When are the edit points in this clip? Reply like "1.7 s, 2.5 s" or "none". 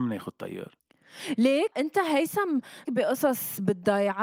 1.7 s, 2.8 s